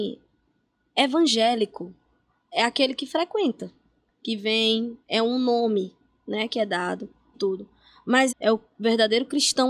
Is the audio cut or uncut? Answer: cut